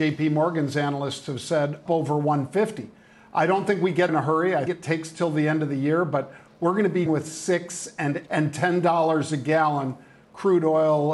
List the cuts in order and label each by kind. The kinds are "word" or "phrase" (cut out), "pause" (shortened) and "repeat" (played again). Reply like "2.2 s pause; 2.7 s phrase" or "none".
1.9 s word; 4.1 s word; 4.7 s word; 7.1 s word; 8.3 s word